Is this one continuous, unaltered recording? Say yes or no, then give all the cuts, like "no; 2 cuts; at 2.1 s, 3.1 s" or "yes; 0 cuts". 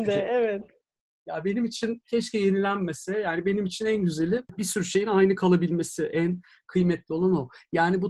yes; 0 cuts